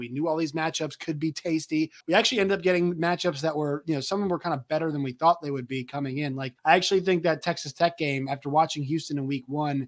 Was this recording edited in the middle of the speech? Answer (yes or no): yes